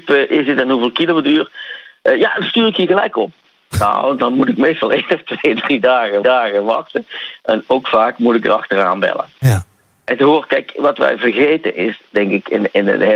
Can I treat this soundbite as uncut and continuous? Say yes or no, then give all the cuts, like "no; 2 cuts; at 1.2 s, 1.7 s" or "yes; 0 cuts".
no; 1 cut; at 6.2 s